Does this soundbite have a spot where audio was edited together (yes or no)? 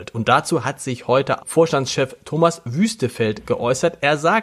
yes